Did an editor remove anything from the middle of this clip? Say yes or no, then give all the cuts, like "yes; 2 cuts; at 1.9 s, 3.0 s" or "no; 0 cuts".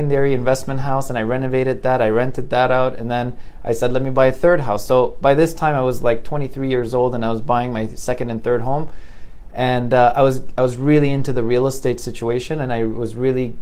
no; 0 cuts